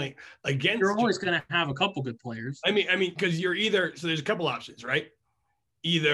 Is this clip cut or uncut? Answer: uncut